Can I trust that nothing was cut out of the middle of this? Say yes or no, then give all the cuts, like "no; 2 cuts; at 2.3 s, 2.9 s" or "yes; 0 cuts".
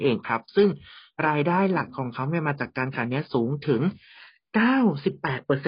yes; 0 cuts